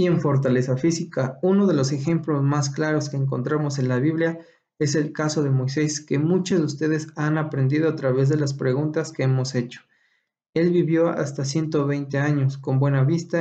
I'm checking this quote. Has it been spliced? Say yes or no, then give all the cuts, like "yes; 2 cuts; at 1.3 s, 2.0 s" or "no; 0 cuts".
no; 0 cuts